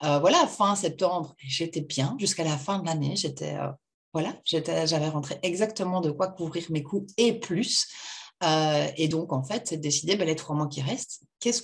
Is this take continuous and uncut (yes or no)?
yes